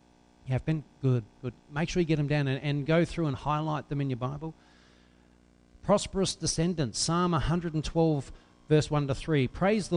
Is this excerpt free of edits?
yes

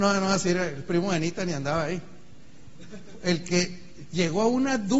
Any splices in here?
no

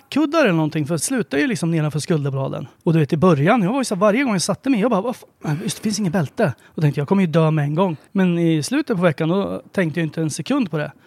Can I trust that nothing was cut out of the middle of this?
no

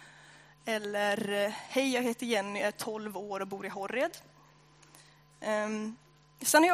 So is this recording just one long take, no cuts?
yes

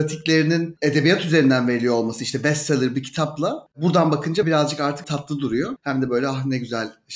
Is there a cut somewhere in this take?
yes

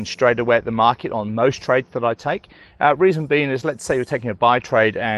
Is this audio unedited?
yes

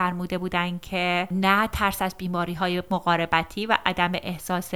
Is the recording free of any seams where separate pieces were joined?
yes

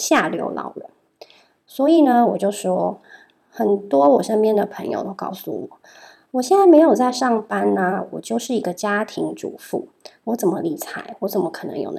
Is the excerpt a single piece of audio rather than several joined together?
yes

